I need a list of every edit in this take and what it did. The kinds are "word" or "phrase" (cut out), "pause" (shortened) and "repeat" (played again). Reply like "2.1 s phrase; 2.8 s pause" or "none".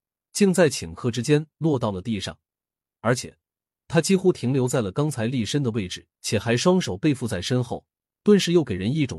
6.1 s pause